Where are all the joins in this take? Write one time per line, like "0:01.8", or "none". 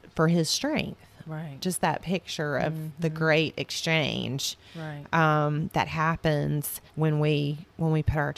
0:06.9